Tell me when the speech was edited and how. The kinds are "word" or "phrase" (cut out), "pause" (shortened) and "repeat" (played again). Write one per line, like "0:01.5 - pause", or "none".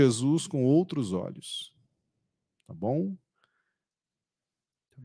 none